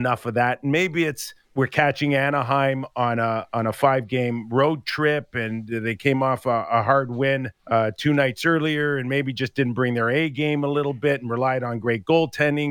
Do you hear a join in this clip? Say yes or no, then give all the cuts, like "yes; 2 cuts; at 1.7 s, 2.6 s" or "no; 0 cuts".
yes; 2 cuts; at 1.4 s, 7.6 s